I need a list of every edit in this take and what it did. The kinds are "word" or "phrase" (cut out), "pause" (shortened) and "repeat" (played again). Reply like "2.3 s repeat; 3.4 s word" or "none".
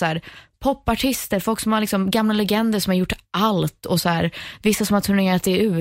none